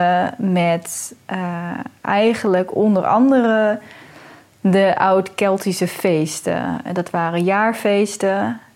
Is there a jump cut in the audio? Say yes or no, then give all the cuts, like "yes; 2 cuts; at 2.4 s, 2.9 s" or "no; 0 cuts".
no; 0 cuts